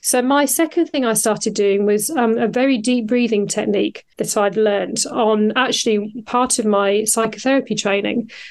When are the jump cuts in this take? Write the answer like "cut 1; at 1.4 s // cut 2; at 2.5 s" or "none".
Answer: cut 1; at 4.1 s